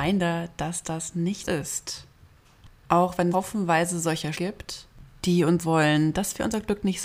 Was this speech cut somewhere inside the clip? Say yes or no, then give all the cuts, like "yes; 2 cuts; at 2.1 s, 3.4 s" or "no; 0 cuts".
yes; 4 cuts; at 1.4 s, 3.3 s, 4.3 s, 5.6 s